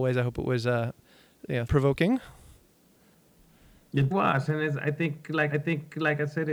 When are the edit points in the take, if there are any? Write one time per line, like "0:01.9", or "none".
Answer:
0:01.7
0:04.1
0:05.5